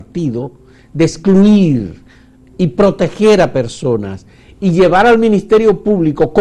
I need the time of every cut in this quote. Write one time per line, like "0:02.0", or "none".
none